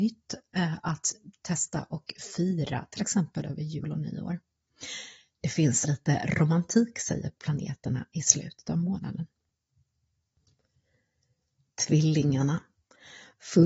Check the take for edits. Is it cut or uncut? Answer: cut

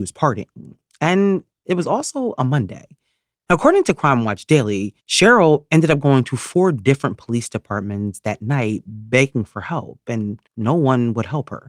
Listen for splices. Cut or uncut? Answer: cut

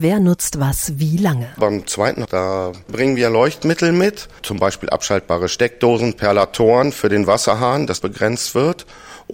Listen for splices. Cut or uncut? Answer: cut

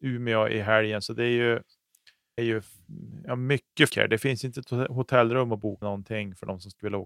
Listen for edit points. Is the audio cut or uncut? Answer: cut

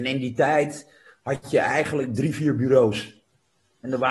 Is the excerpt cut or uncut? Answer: uncut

